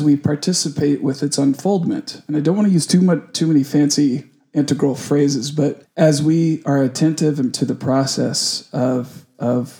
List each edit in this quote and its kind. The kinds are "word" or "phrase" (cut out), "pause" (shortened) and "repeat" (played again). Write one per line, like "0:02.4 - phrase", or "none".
0:05.8 - pause
0:07.5 - word